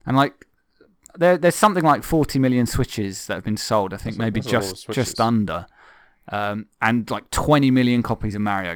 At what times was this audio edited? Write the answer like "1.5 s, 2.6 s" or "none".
none